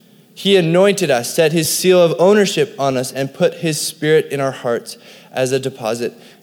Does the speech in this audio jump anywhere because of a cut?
no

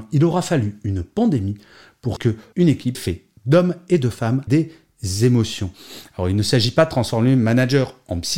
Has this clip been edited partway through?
yes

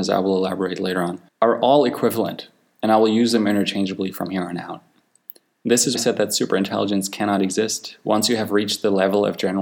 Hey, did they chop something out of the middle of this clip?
yes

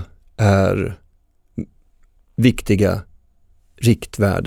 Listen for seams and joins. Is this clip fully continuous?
yes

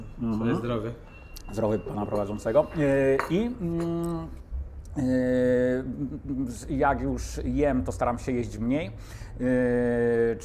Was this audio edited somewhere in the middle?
no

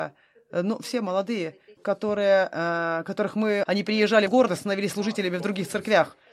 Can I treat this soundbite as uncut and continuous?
no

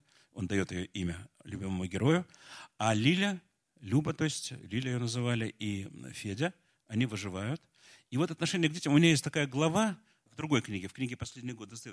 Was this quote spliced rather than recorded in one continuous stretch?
no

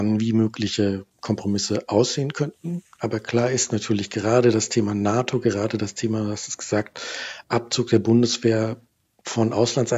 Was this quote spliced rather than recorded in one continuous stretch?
no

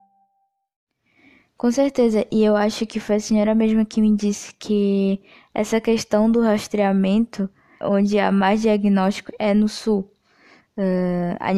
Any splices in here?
yes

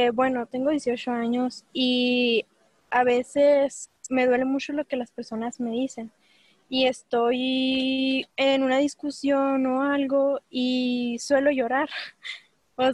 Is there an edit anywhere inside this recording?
yes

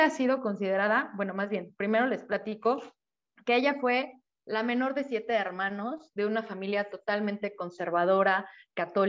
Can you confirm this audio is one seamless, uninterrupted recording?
yes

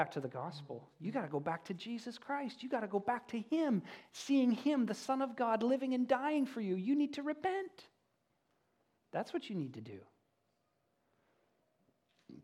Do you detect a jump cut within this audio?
no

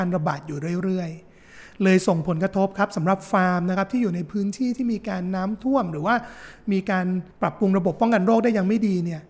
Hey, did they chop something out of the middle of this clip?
yes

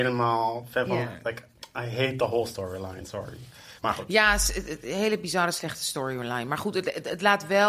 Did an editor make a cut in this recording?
yes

